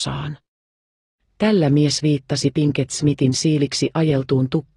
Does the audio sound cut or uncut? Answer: uncut